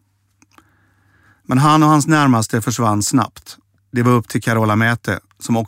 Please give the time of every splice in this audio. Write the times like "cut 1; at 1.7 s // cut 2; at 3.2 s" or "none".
cut 1; at 3.8 s